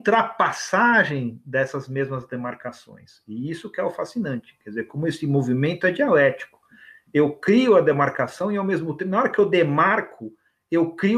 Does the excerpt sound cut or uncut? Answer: uncut